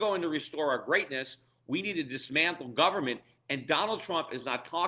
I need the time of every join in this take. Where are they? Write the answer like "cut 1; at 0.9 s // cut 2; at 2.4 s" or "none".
none